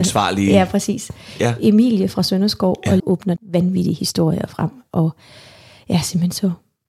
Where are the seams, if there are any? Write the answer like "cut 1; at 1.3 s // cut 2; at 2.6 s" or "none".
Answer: cut 1; at 3.0 s // cut 2; at 3.4 s